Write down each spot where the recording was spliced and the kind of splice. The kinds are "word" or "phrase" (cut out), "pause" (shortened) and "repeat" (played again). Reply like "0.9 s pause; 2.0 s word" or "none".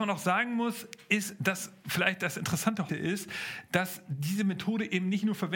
2.9 s word